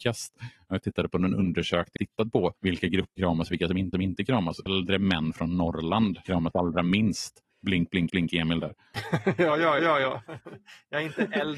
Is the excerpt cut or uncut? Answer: cut